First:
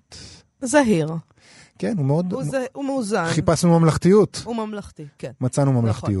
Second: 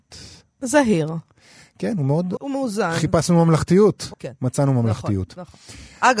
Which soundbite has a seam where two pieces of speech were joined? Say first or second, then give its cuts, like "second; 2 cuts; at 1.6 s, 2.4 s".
second; 2 cuts; at 2.4 s, 4.1 s